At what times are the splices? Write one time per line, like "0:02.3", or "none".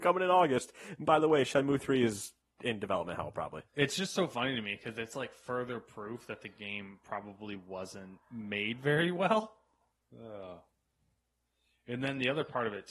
0:03.7
0:08.2
0:09.9